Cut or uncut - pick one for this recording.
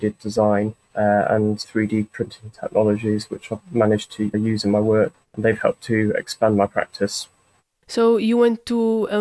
cut